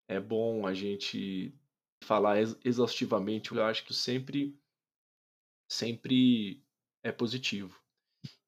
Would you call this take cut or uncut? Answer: cut